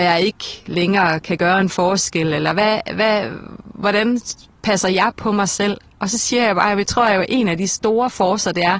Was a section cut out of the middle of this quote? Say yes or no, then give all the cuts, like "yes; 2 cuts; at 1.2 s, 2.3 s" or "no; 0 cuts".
no; 0 cuts